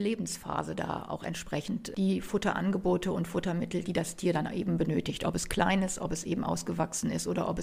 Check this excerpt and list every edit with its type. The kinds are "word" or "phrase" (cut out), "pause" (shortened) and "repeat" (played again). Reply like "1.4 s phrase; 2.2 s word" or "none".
none